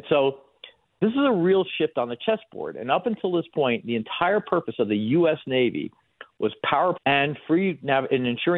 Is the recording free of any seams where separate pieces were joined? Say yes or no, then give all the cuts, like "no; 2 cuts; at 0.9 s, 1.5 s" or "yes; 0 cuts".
no; 1 cut; at 7.0 s